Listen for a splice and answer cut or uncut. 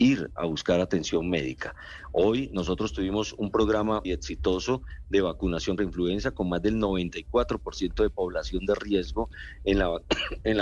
cut